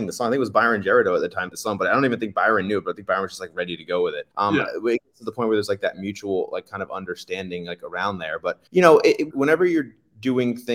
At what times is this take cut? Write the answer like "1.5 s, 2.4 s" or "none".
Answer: 1.5 s, 4.3 s, 8.7 s, 9.3 s